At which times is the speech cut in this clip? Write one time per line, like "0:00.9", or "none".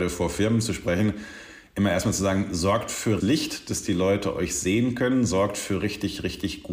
0:03.2